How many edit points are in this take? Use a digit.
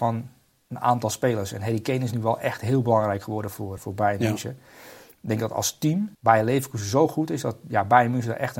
2